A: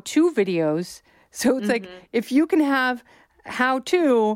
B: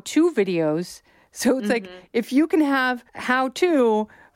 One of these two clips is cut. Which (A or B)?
B